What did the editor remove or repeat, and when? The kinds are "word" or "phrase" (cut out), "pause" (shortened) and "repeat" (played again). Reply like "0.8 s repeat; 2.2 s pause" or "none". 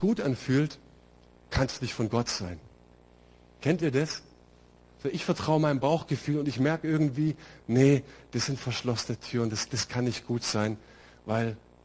none